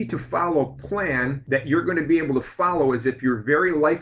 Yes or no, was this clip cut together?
no